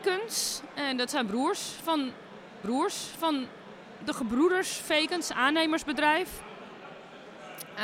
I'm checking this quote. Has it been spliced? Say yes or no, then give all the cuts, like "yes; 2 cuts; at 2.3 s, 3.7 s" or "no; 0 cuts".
yes; 2 cuts; at 2.6 s, 4.8 s